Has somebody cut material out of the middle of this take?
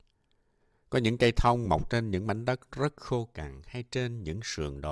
no; 0 cuts

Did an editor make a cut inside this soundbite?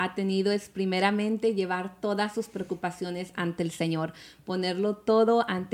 no; 0 cuts

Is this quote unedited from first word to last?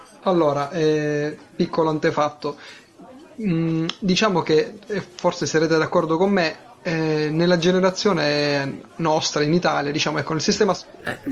yes; 0 cuts

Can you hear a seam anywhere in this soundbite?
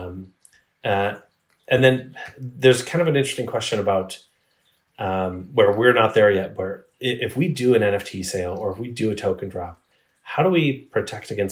no; 0 cuts

